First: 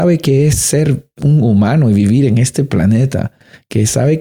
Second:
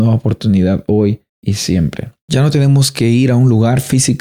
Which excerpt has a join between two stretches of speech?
second; 2 cuts; at 1.3 s, 2.2 s

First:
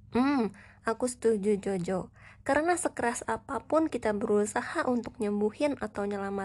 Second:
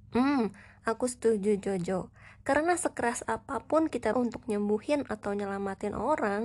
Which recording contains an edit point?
second; 1 cut; at 4.1 s

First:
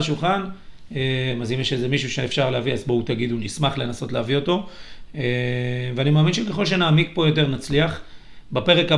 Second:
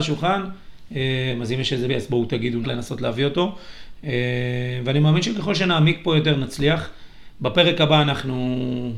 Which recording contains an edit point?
second; 2 cuts; at 1.9 s, 2.6 s

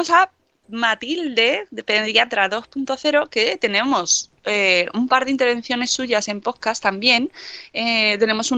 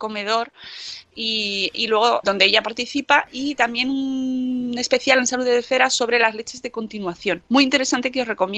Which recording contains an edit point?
second; 1 cut; at 2.2 s

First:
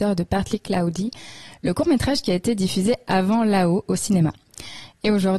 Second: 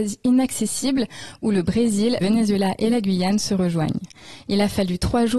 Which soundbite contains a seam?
second; 1 cut; at 2.2 s

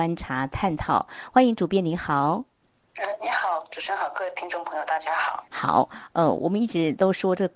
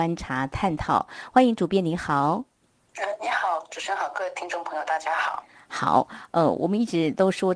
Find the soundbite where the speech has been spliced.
first; 1 cut; at 5.5 s

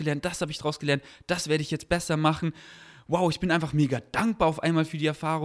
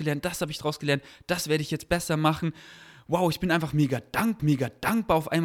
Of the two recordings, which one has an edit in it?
second; 1 cut; at 4.4 s

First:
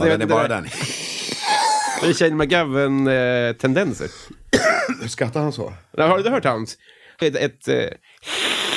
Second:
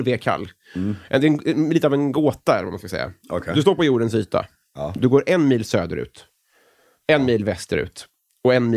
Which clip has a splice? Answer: first; 1 cut; at 7.2 s

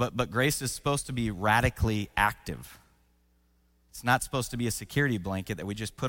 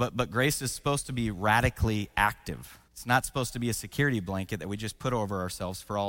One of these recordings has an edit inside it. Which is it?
second; 1 cut; at 2.9 s

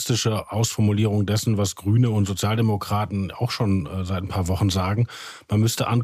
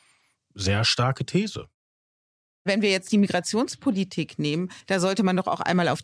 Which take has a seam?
second; 1 cut; at 4.8 s

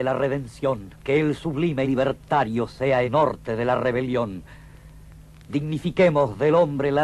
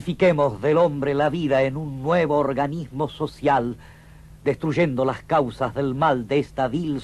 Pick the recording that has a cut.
first; 3 cuts; at 1.0 s, 1.8 s, 3.0 s

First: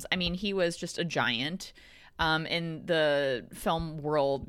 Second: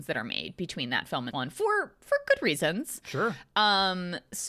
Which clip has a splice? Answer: second; 1 cut; at 1.3 s

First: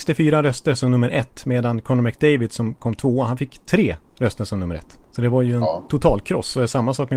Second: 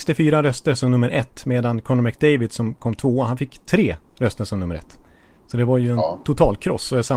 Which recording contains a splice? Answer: first; 1 cut; at 5.0 s

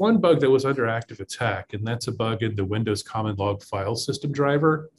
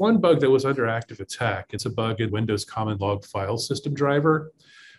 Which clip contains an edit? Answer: second; 2 cuts; at 1.8 s, 2.3 s

